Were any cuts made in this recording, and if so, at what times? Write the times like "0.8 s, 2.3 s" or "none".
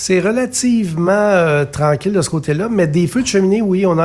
none